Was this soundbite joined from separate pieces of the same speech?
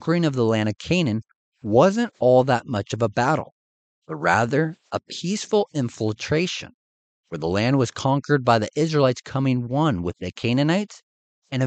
no; 0 cuts

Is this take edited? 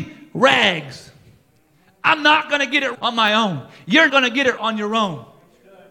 yes; 3 cuts; at 2.9 s, 4.1 s, 4.6 s

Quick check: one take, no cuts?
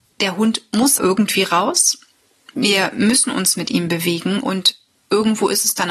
no; 1 cut; at 1.0 s

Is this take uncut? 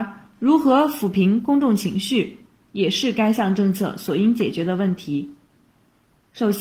yes; 0 cuts

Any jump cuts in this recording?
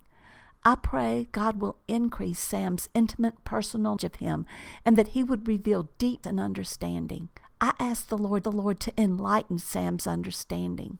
yes; 4 cuts; at 4.0 s, 6.2 s, 7.4 s, 8.4 s

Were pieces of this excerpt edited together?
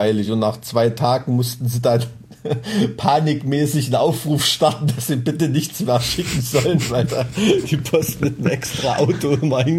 no; 0 cuts

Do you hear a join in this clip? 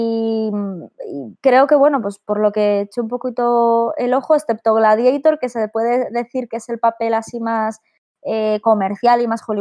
no; 0 cuts

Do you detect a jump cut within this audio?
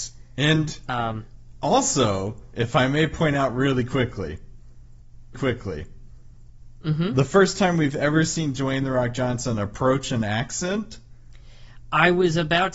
yes; 1 cut; at 5.3 s

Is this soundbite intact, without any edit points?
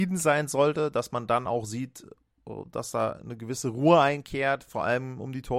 yes; 0 cuts

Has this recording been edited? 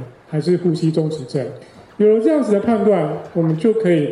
no; 0 cuts

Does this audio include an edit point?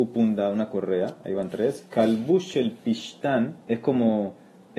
yes; 1 cut; at 3.6 s

